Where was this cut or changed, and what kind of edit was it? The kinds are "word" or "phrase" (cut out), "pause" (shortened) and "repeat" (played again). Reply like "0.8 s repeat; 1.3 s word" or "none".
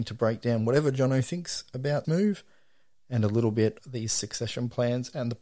2.0 s word; 3.8 s phrase